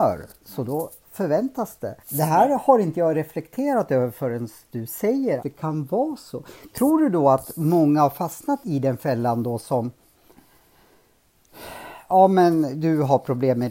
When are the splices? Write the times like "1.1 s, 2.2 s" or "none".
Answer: 1.0 s, 2.0 s, 5.4 s, 8.6 s